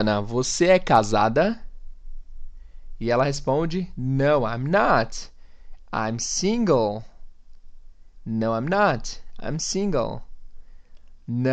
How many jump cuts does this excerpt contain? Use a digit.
0